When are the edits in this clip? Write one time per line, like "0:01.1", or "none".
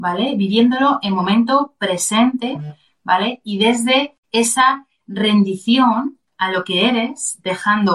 0:04.2